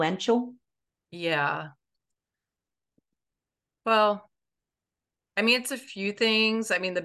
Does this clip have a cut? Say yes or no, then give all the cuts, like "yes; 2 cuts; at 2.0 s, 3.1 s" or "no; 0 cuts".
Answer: no; 0 cuts